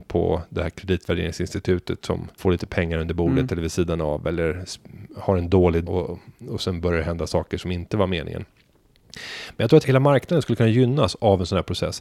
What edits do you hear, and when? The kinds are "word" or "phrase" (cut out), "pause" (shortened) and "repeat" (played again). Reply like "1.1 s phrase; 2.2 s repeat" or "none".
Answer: 2.4 s word; 5.9 s word; 9.8 s word